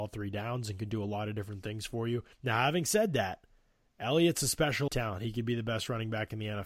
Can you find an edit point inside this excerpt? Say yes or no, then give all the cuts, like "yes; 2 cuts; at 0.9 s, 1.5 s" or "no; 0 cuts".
yes; 2 cuts; at 2.3 s, 4.9 s